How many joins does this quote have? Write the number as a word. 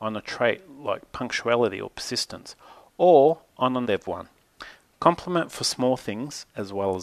one